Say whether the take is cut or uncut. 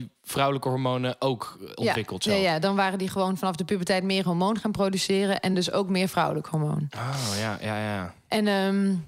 uncut